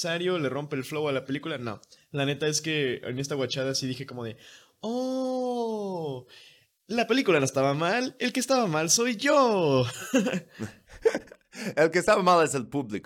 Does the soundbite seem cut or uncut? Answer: uncut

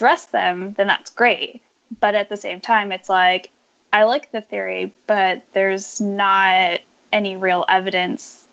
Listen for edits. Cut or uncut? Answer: uncut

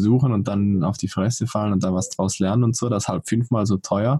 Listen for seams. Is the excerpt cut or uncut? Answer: uncut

